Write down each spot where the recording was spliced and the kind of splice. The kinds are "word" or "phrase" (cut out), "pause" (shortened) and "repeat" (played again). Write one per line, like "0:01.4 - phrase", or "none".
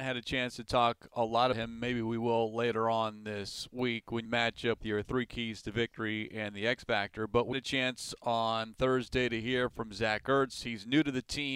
0:01.5 - word
0:04.3 - phrase
0:04.8 - word
0:07.5 - word